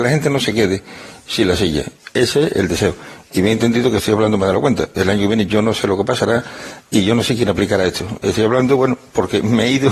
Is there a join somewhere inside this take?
no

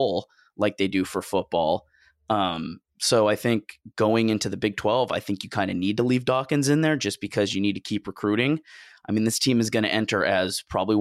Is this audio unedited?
yes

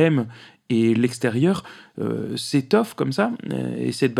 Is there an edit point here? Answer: no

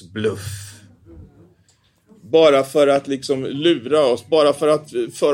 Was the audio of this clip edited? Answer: no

